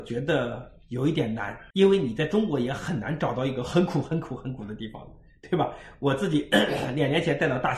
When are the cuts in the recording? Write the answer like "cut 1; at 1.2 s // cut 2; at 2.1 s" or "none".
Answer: cut 1; at 1.7 s